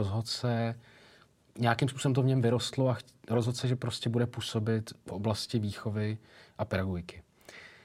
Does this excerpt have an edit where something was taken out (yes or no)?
no